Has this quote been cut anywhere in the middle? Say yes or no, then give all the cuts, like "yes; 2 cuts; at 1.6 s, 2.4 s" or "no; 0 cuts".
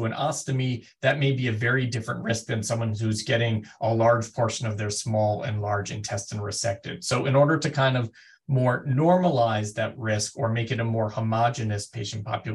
no; 0 cuts